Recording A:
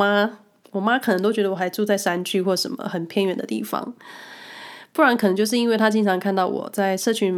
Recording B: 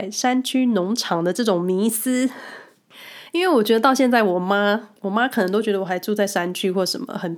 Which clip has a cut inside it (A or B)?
B